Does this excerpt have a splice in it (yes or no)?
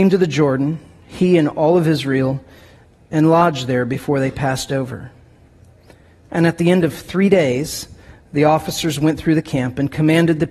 no